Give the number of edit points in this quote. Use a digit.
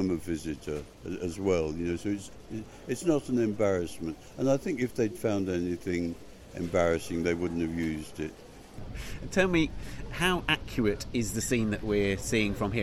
1